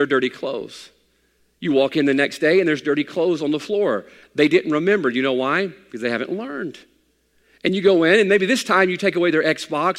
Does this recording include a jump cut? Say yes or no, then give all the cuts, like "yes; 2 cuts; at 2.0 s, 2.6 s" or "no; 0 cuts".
no; 0 cuts